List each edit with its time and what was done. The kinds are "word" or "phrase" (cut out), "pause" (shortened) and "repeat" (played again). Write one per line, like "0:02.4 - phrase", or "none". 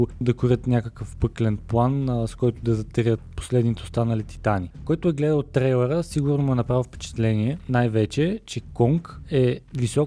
none